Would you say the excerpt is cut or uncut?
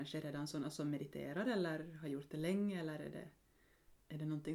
uncut